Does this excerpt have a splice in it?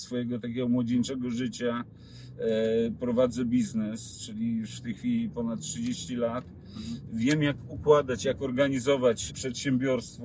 yes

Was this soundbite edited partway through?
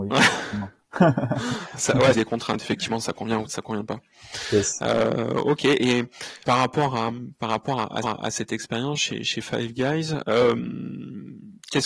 yes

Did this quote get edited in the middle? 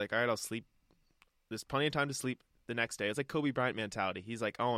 no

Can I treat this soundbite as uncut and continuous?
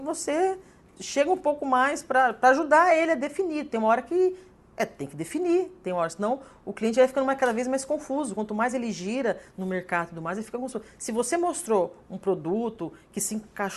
yes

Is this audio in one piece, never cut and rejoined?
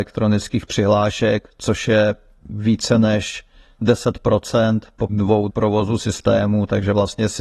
no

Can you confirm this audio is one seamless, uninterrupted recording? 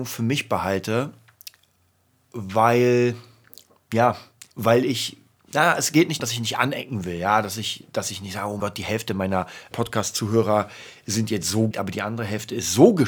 no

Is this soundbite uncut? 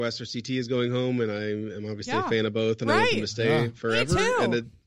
yes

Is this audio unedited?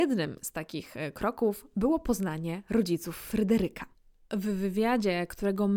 yes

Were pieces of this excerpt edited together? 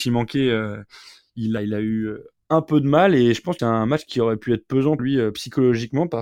yes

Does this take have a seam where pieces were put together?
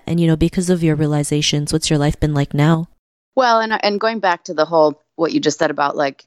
yes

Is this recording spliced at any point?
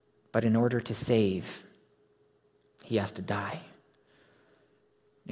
no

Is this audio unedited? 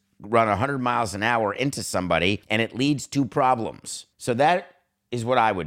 no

